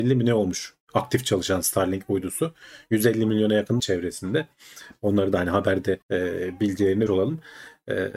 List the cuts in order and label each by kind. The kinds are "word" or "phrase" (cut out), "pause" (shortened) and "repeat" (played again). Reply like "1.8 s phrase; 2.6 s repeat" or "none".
3.8 s phrase; 6.0 s pause; 7.1 s word